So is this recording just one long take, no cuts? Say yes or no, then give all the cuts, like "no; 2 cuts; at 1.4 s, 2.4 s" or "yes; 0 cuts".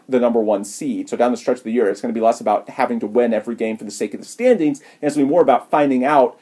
yes; 0 cuts